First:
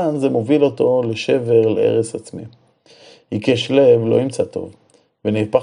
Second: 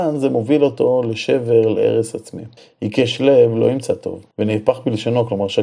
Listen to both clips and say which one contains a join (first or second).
second